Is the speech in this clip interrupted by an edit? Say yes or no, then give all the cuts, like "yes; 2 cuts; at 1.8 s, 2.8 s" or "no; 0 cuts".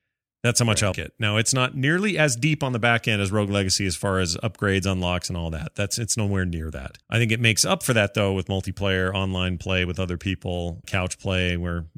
yes; 3 cuts; at 0.9 s, 7.0 s, 10.8 s